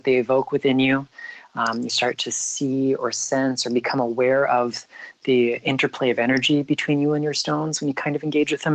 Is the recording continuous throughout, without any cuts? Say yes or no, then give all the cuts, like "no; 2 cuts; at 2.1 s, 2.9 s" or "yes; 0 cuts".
yes; 0 cuts